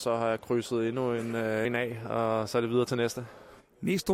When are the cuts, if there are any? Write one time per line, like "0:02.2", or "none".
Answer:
0:01.6